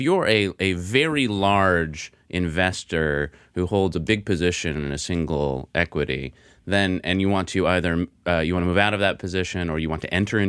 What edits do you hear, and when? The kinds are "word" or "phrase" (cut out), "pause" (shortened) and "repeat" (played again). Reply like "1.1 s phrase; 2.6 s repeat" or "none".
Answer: none